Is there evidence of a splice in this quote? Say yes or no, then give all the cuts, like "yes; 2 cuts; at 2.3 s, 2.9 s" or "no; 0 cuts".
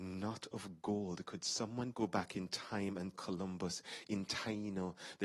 yes; 2 cuts; at 1.9 s, 3.1 s